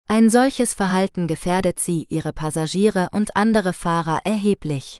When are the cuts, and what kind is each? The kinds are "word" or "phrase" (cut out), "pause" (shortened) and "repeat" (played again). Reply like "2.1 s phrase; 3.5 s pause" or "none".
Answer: none

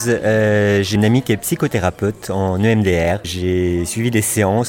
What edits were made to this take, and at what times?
1.0 s word

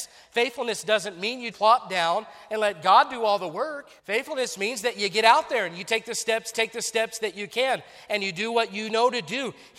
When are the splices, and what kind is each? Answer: 1.5 s word; 4.0 s pause; 6.5 s repeat

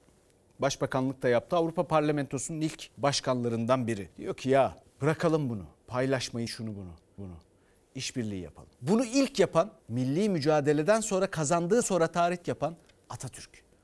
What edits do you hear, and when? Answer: 2.9 s pause; 4.1 s pause; 4.8 s pause; 6.5 s word; 7.2 s repeat; 8.7 s pause; 9.8 s pause; 11.8 s word; 12.4 s word

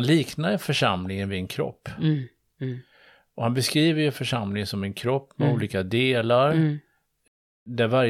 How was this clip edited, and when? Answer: none

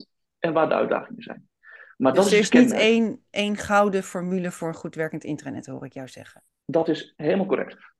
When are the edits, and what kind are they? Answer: 6.6 s pause

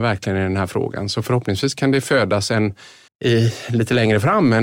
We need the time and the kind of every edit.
3.1 s pause

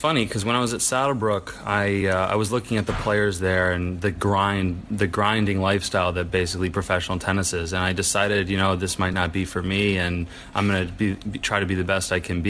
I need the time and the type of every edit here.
none

